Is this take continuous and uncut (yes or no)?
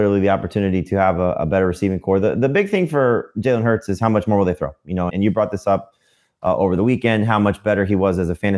no